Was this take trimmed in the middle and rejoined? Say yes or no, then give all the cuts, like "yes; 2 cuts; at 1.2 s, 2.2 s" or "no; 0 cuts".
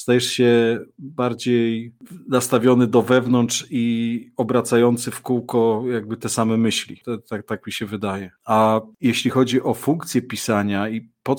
yes; 1 cut; at 8.4 s